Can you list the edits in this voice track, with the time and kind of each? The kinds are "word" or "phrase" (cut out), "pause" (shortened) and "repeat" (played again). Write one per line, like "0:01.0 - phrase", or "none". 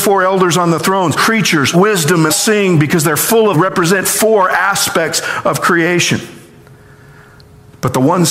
0:01.2 - phrase
0:01.7 - word
0:02.3 - word
0:03.5 - phrase